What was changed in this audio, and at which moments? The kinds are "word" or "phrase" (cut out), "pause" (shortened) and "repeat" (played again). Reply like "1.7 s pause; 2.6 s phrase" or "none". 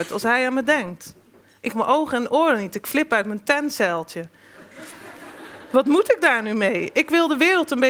1.7 s word